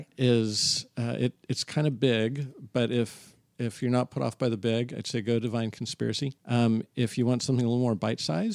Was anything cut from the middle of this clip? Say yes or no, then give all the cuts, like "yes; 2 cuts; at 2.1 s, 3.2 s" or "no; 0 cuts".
yes; 1 cut; at 6.4 s